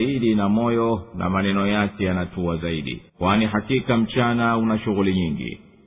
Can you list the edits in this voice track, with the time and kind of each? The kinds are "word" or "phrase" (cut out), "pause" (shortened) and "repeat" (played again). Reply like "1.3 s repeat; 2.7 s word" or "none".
3.1 s pause